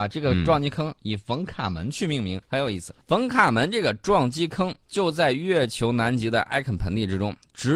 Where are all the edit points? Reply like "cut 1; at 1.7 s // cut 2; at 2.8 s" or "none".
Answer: cut 1; at 2.4 s // cut 2; at 3.0 s // cut 3; at 4.8 s